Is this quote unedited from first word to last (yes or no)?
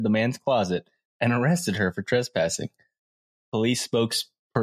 yes